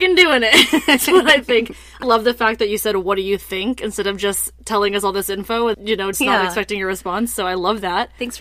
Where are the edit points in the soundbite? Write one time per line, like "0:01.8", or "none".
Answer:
0:02.0
0:05.7
0:06.1